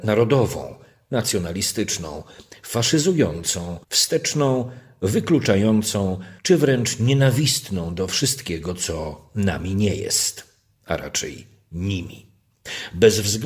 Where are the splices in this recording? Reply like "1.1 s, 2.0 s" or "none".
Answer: 3.8 s, 6.4 s